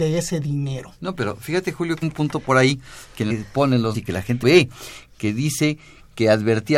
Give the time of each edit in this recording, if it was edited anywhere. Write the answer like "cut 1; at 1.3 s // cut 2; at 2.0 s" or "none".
cut 1; at 1.0 s // cut 2; at 2.0 s // cut 3; at 3.3 s // cut 4; at 3.9 s // cut 5; at 4.4 s